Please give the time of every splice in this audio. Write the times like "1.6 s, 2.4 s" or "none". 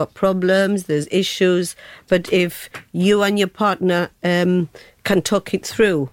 none